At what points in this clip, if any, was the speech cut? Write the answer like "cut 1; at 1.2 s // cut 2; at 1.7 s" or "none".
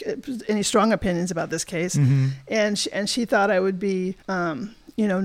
cut 1; at 4.2 s